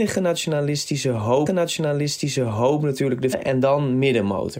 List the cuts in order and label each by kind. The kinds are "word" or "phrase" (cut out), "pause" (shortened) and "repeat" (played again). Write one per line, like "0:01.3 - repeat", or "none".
0:01.5 - repeat
0:03.3 - word